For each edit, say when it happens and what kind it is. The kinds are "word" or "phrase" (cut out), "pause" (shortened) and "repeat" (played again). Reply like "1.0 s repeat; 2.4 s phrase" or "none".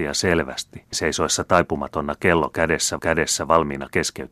0.9 s word; 3.0 s repeat

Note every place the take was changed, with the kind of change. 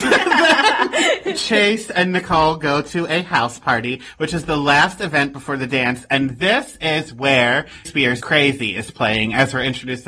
7.8 s word; 8.2 s word

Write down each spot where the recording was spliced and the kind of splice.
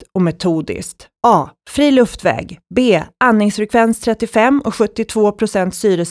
1.2 s pause

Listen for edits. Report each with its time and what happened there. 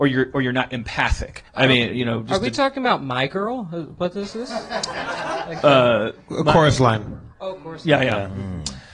1.5 s pause

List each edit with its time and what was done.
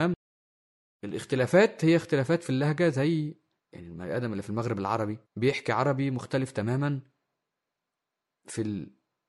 3.6 s pause; 5.2 s pause

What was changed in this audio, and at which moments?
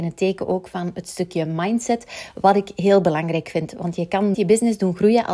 4.3 s word

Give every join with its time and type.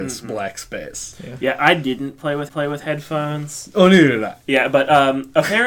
2.5 s repeat

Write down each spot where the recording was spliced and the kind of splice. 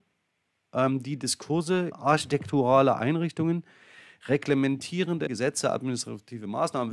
1.9 s word; 5.3 s word

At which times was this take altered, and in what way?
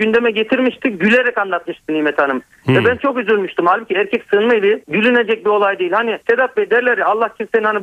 4.8 s pause; 6.2 s pause

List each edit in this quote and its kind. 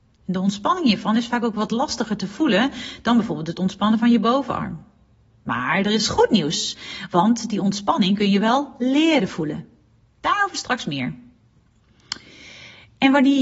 none

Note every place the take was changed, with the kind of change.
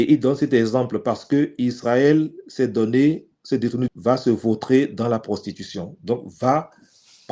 3.9 s phrase

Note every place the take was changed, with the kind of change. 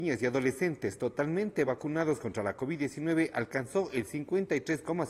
none

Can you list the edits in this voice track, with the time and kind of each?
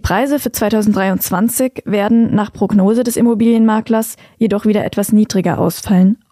none

